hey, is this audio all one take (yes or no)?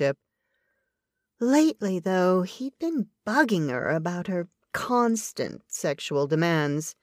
yes